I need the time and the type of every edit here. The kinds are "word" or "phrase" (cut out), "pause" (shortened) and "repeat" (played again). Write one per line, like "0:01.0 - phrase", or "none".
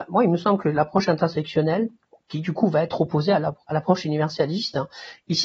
none